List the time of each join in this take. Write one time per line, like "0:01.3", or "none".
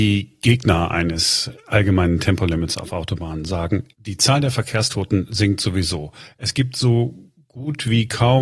0:03.9